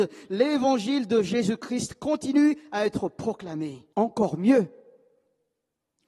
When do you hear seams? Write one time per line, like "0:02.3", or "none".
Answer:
0:03.9